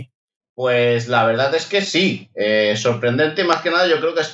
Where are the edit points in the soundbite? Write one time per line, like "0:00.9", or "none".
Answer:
none